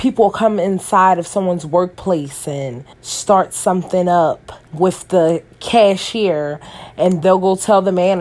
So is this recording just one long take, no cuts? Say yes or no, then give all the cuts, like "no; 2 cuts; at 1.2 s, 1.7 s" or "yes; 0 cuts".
no; 3 cuts; at 2.9 s, 4.7 s, 7.2 s